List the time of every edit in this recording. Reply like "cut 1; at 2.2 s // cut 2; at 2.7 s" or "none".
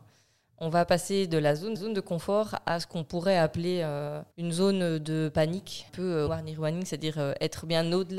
cut 1; at 1.7 s // cut 2; at 4.3 s // cut 3; at 5.9 s // cut 4; at 6.3 s